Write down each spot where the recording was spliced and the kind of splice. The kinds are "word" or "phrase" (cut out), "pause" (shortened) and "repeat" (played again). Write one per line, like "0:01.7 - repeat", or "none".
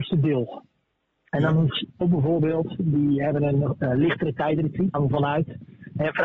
0:02.0 - word
0:04.9 - word